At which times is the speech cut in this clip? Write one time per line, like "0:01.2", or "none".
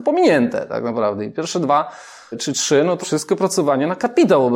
0:02.3
0:03.0